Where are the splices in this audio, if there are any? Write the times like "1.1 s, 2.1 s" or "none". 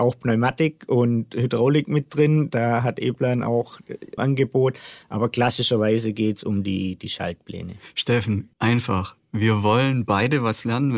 4.2 s, 8.5 s